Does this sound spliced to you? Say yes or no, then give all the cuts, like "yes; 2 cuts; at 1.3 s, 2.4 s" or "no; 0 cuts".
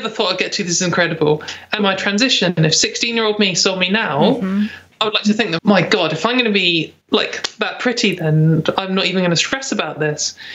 yes; 3 cuts; at 1.8 s, 5.6 s, 7.0 s